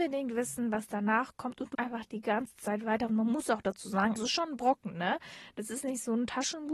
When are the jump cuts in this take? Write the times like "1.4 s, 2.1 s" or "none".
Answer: 1.7 s, 4.2 s

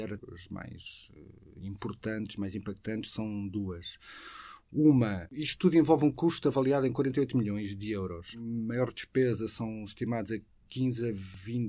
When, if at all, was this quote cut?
none

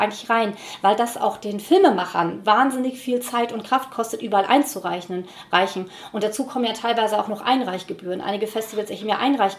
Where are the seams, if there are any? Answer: none

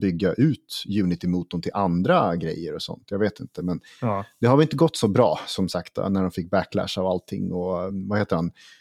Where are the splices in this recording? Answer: none

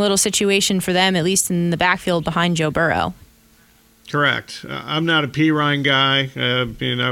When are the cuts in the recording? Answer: none

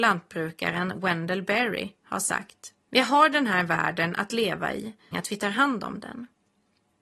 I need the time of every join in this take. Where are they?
2.8 s, 5.1 s

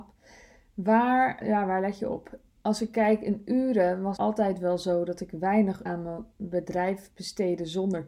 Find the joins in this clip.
1.4 s, 4.2 s, 5.9 s

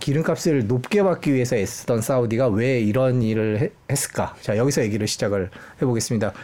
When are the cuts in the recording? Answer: none

